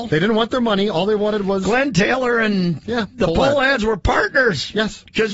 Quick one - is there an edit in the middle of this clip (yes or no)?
no